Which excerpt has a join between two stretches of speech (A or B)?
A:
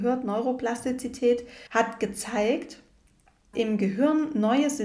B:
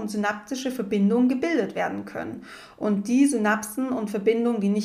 A